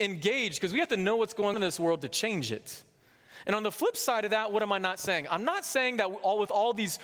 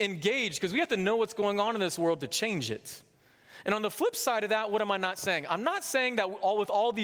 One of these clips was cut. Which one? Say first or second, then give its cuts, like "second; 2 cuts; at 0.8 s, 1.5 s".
first; 1 cut; at 1.5 s